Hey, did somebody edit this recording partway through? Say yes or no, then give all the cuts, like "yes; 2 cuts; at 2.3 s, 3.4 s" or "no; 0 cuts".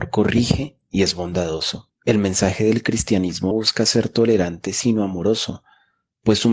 yes; 1 cut; at 3.5 s